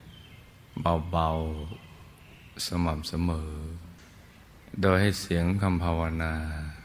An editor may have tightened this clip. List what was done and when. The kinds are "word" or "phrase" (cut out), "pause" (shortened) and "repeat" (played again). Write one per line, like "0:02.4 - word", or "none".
none